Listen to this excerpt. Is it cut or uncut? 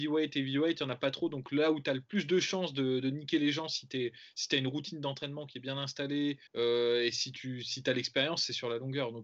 cut